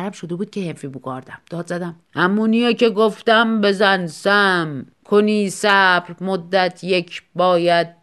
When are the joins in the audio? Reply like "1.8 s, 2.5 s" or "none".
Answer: 2.0 s, 4.9 s